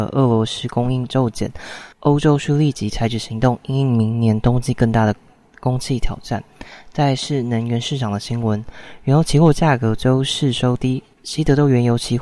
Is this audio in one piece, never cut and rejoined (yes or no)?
no